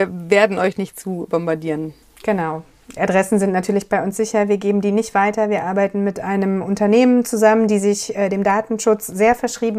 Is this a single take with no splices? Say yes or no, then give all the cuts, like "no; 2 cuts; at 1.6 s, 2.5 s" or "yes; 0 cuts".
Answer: no; 1 cut; at 2.0 s